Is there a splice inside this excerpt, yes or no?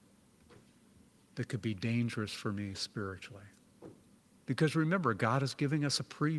no